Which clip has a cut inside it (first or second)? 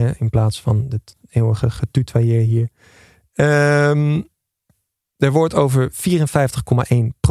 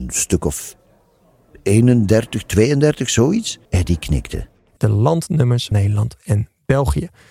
second